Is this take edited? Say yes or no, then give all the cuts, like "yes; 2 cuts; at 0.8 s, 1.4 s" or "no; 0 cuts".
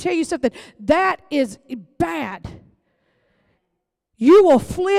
no; 0 cuts